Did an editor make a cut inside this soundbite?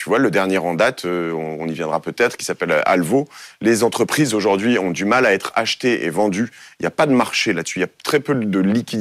no; 0 cuts

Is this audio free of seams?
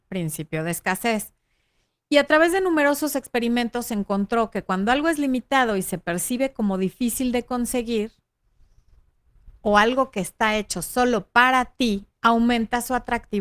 yes; 0 cuts

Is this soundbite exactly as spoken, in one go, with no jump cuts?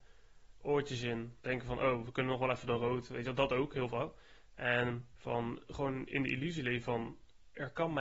no; 2 cuts; at 1.4 s, 5.1 s

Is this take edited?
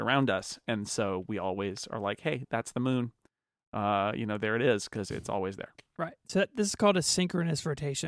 no; 0 cuts

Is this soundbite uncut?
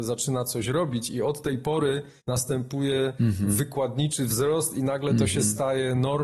no; 1 cut; at 2.2 s

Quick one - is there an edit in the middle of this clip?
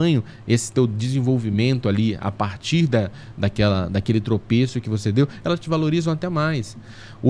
no; 0 cuts

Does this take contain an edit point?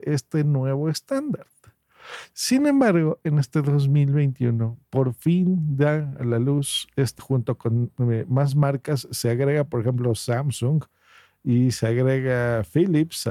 yes; 1 cut; at 7.2 s

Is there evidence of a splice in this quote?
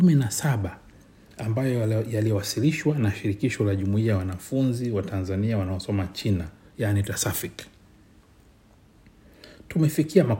no; 0 cuts

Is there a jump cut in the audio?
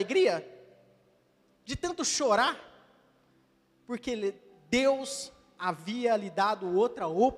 no; 0 cuts

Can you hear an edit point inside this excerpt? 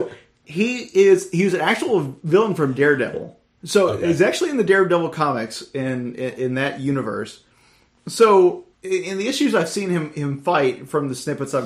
yes; 1 cut; at 8.7 s

